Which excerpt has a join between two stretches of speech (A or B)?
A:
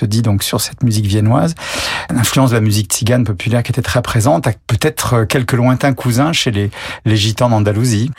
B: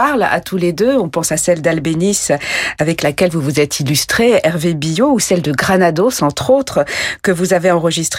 A